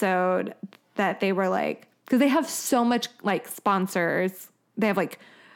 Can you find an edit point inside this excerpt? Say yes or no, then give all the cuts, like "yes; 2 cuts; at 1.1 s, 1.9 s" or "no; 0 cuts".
no; 0 cuts